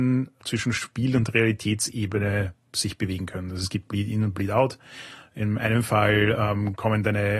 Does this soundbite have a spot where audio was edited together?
no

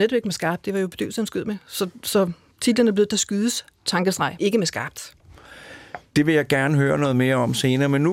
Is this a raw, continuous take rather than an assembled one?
no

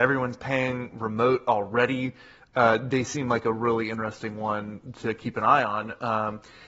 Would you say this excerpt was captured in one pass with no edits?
yes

